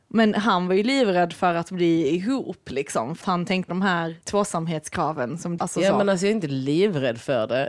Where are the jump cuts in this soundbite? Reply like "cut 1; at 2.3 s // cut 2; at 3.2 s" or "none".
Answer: cut 1; at 3.2 s // cut 2; at 3.7 s // cut 3; at 4.2 s // cut 4; at 5.6 s